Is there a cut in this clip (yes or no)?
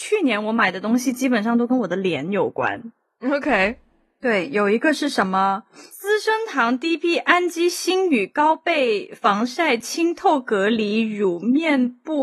no